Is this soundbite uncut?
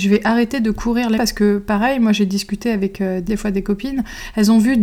no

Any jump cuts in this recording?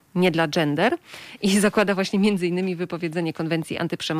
no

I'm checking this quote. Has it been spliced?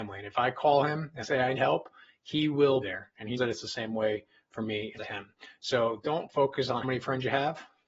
yes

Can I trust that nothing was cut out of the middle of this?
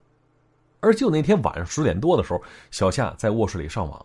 yes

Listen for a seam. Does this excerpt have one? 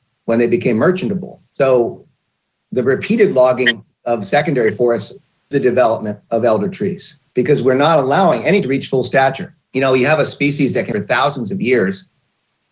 yes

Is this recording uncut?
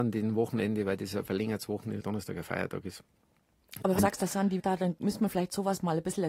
no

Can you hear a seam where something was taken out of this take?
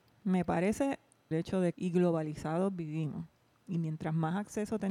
yes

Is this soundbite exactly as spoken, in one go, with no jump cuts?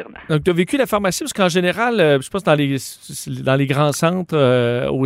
yes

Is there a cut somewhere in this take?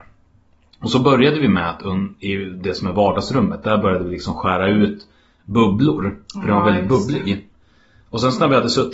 no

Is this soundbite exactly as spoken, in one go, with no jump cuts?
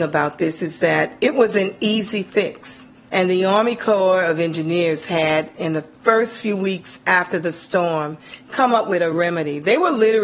yes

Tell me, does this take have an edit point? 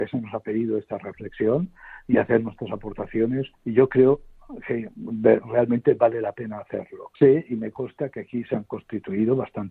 yes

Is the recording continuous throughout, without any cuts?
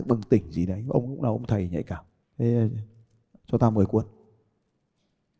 yes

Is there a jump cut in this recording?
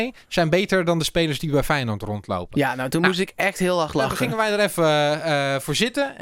no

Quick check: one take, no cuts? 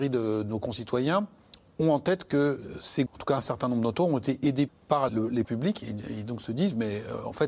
no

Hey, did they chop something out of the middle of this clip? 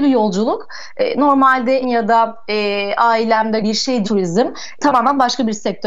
yes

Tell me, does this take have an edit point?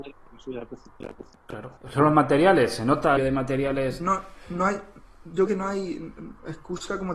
yes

